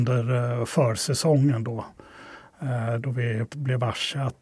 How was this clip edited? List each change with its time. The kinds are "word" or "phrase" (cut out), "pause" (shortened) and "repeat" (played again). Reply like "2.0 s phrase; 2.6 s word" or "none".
3.5 s word